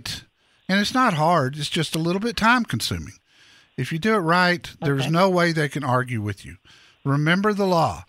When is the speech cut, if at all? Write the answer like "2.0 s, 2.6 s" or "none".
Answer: none